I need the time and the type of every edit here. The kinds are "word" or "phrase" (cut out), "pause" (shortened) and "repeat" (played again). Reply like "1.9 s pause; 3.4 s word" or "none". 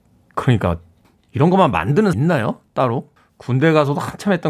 1.0 s pause; 2.1 s word; 3.2 s pause